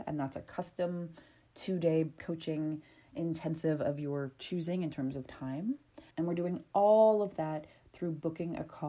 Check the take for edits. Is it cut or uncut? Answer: cut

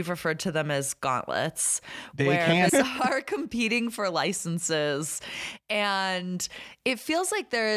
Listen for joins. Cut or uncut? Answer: cut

